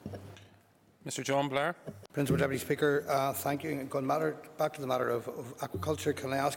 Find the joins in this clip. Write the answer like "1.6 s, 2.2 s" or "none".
2.1 s